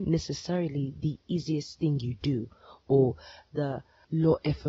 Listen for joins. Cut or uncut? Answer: uncut